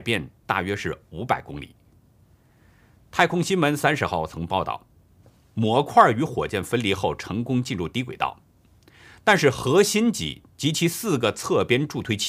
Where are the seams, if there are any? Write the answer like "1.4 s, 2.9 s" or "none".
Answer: none